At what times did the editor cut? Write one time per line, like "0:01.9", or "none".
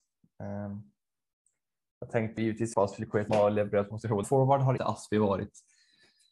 0:02.4
0:02.7
0:03.3
0:03.9
0:04.2
0:04.8